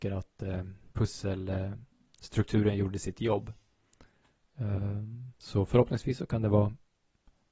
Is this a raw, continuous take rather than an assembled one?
no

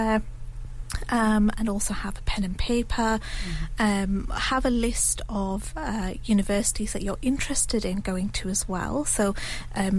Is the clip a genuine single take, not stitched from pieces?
yes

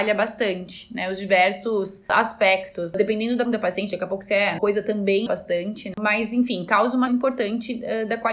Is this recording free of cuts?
no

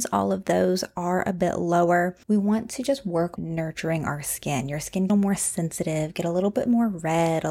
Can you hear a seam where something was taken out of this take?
yes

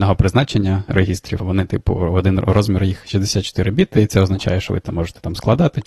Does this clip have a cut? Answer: yes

